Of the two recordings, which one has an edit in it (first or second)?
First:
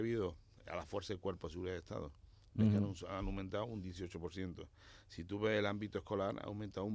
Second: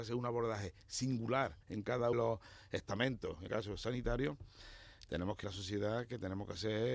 second